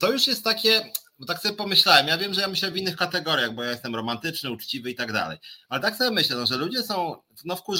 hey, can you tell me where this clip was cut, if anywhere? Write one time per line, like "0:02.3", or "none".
none